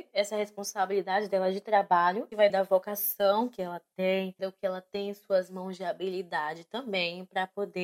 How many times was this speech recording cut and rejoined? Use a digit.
1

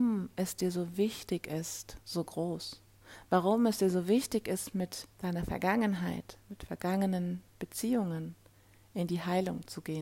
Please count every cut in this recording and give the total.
4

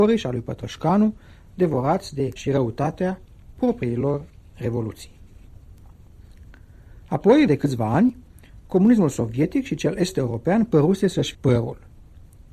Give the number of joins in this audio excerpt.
3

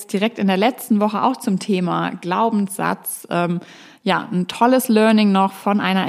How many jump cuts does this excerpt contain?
0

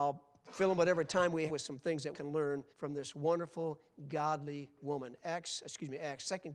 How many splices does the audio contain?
4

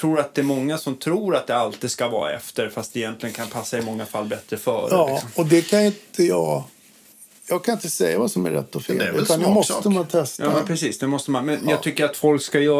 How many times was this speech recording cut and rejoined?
0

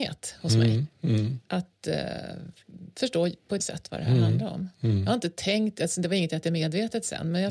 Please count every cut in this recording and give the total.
2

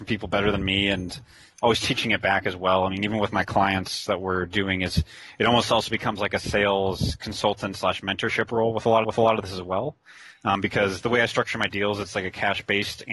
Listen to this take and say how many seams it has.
1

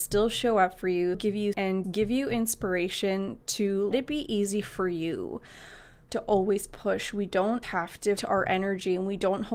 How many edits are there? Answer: 7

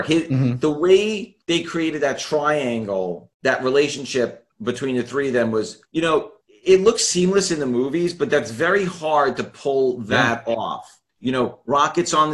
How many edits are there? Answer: 6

